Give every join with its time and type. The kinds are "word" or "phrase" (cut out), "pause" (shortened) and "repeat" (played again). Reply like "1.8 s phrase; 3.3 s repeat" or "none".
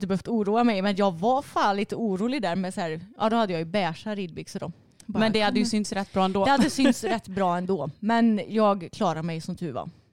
none